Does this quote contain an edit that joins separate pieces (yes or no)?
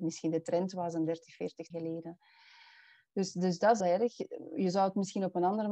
yes